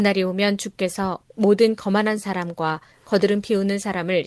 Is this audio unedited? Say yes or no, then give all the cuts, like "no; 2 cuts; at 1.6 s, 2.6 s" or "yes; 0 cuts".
yes; 0 cuts